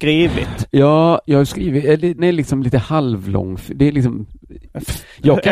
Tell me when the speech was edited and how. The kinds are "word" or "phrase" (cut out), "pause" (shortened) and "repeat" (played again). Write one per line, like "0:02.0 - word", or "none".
0:02.2 - word